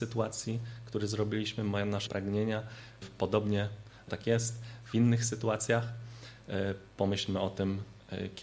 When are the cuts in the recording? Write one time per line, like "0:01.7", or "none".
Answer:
0:02.1
0:03.0
0:04.1